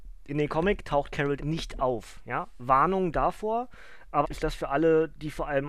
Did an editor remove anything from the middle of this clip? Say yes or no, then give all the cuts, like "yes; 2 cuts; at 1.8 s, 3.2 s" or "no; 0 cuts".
yes; 2 cuts; at 1.4 s, 4.2 s